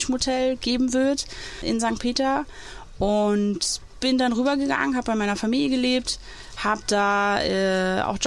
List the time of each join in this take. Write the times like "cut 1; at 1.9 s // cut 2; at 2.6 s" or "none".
none